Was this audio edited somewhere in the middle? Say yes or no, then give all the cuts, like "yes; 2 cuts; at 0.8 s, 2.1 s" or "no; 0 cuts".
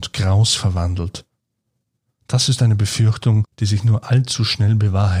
no; 0 cuts